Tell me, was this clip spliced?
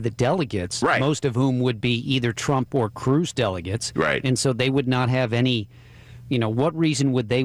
no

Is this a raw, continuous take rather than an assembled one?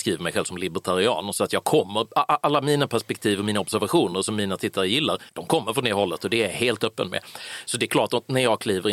no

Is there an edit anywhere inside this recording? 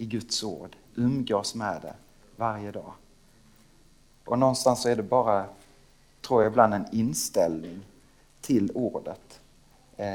no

